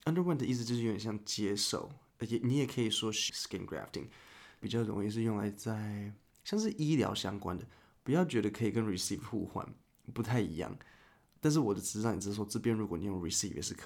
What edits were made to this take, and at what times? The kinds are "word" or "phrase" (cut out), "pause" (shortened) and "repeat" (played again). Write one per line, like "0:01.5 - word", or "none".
0:03.3 - word
0:04.6 - phrase